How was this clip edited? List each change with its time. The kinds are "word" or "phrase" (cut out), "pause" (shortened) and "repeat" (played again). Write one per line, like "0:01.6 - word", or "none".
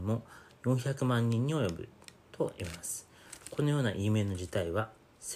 0:02.2 - pause

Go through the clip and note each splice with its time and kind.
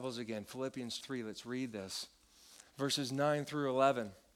0:01.0 - word
0:02.7 - pause

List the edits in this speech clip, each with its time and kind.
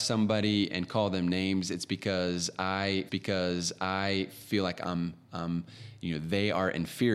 0:03.1 - repeat

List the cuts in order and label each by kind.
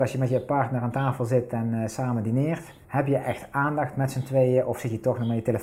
0:02.8 - pause

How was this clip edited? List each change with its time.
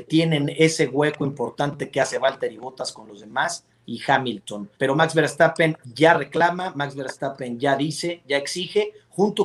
0:04.8 - pause

